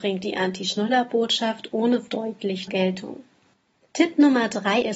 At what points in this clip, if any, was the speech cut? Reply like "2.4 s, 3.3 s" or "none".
2.1 s, 2.7 s